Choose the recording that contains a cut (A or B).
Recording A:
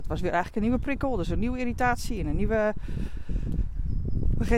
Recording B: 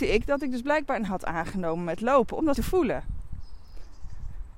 B